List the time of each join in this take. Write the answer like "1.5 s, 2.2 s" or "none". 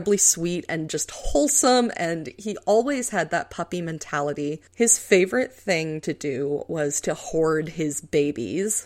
4.7 s